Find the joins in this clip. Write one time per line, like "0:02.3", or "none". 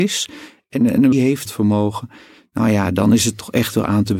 0:01.1
0:01.4

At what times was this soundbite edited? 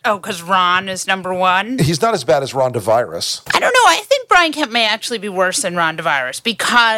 none

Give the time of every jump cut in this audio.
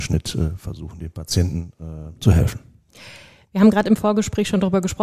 none

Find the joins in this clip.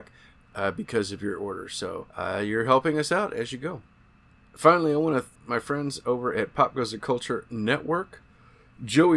0:02.1
0:05.3

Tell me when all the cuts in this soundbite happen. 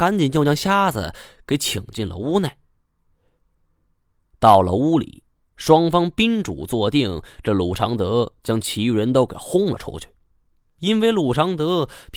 none

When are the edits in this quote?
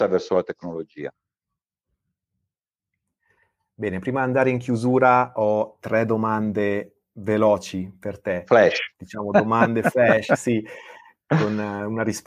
none

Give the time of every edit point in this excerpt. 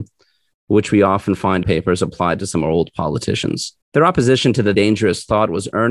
0:01.6
0:03.8
0:04.7

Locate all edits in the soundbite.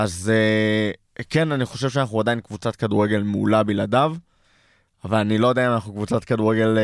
none

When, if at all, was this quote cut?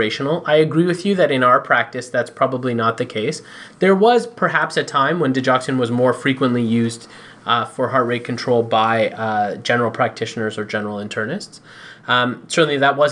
none

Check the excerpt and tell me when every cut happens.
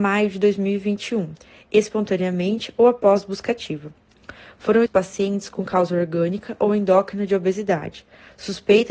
0:04.9

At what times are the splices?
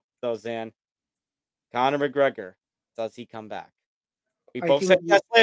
0:02.6

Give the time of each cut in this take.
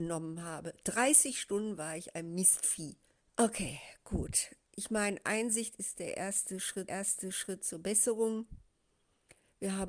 0:03.2
0:04.6
0:06.9

